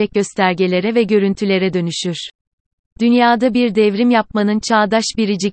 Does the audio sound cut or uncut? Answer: uncut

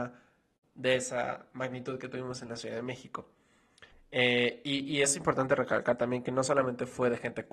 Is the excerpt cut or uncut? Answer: cut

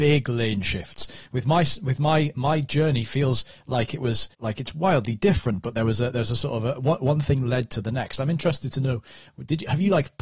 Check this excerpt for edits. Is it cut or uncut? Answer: cut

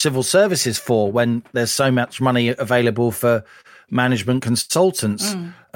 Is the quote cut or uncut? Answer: uncut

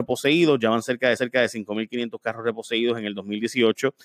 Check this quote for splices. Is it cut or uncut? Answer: cut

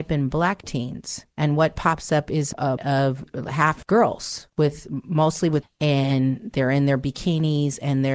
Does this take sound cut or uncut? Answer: cut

